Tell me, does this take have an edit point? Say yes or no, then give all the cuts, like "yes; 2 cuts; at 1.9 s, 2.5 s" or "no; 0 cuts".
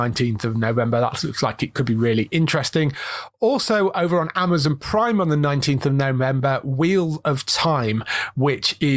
no; 0 cuts